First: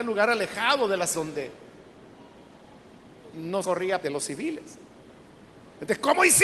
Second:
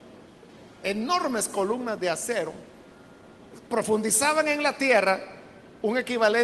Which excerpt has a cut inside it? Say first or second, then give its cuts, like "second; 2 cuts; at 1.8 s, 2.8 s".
first; 3 cuts; at 1.1 s, 3.6 s, 4.0 s